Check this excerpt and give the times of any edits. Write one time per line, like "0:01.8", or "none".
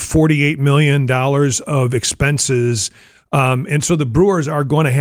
none